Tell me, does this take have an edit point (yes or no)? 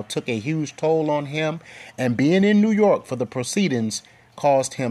no